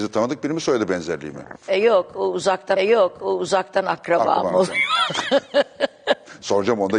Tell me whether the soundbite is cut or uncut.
cut